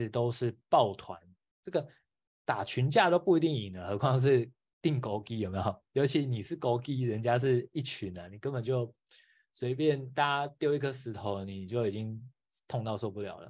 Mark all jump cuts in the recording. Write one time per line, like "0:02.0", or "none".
none